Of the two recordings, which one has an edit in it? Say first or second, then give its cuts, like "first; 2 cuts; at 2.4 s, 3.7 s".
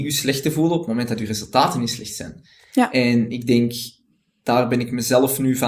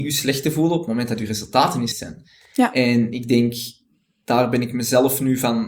second; 1 cut; at 1.9 s